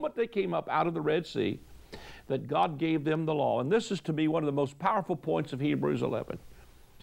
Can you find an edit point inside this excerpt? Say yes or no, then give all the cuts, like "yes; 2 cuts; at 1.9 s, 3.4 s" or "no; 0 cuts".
no; 0 cuts